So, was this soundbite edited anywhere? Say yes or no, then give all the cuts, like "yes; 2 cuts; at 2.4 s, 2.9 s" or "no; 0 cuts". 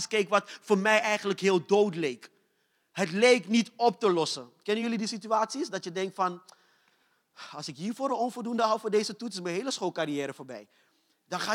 no; 0 cuts